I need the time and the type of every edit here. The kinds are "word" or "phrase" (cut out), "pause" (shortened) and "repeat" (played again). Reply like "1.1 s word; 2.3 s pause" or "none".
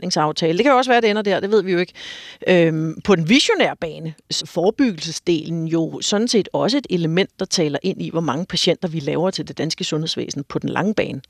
4.4 s word